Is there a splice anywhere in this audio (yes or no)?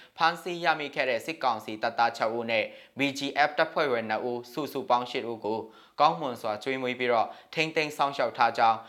no